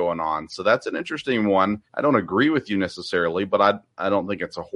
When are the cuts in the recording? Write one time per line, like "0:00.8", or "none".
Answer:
0:01.9